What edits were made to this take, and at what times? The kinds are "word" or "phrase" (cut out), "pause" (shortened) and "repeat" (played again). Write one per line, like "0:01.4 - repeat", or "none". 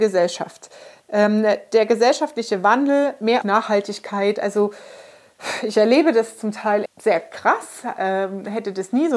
0:03.4 - word
0:06.9 - word